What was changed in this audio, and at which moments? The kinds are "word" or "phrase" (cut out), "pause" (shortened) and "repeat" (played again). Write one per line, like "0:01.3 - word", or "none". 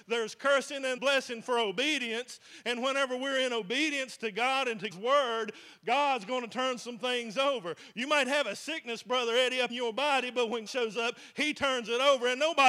0:01.0 - word
0:04.9 - word
0:09.7 - word
0:10.7 - word